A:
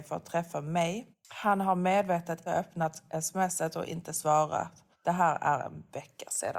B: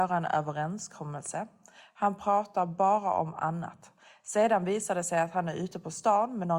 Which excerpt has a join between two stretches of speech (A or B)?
A